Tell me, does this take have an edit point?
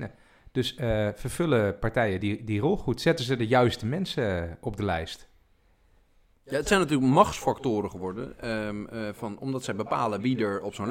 no; 0 cuts

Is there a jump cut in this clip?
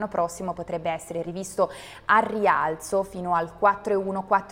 no; 0 cuts

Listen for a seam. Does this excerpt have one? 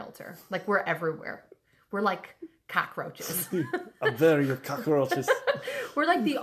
no; 0 cuts

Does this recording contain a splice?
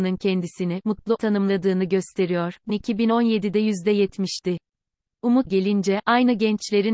yes; 3 cuts; at 1.2 s, 2.7 s, 5.5 s

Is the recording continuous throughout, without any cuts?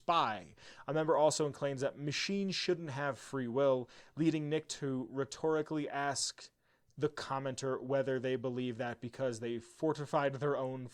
yes; 0 cuts

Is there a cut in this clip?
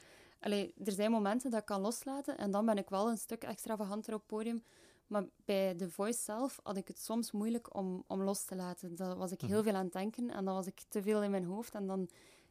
no; 0 cuts

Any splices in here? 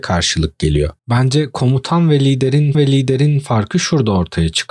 yes; 2 cuts; at 1.0 s, 2.7 s

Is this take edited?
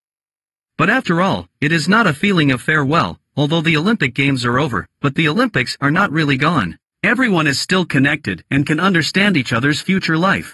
yes; 1 cut; at 6.8 s

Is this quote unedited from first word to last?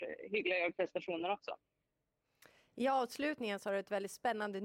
yes; 0 cuts

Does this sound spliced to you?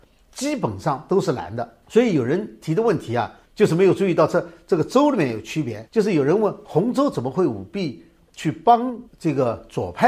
yes; 4 cuts; at 1.8 s, 3.5 s, 5.9 s, 9.1 s

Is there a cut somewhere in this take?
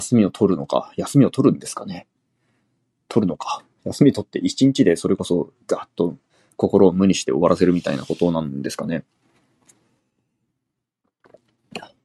no; 0 cuts

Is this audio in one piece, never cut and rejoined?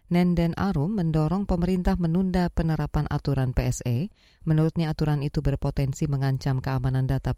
yes; 0 cuts

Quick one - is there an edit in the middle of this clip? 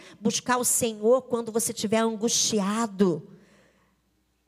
no; 0 cuts

